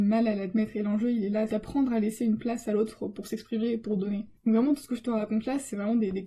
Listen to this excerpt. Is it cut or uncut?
uncut